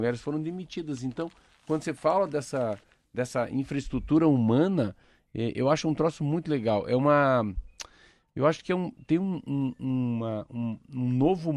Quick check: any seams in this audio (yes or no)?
no